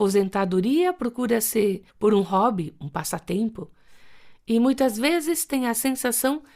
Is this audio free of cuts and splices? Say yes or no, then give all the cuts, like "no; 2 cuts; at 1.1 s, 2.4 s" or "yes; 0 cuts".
no; 1 cut; at 1.9 s